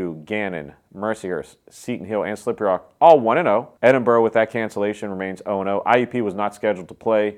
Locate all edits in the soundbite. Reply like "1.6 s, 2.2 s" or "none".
3.8 s